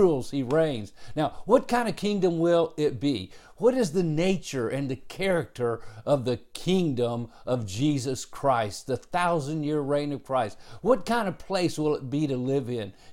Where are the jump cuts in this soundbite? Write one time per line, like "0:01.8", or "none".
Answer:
none